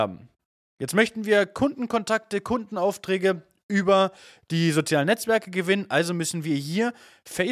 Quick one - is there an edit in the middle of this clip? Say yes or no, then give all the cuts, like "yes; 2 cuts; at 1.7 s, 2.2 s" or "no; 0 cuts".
no; 0 cuts